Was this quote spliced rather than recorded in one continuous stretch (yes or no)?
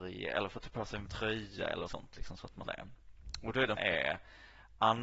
yes